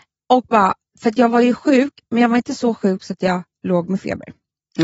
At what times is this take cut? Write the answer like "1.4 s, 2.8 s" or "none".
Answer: none